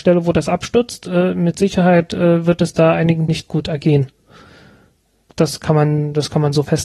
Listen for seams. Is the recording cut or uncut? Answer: cut